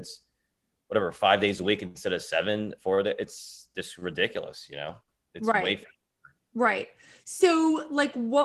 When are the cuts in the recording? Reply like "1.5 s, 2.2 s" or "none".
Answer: none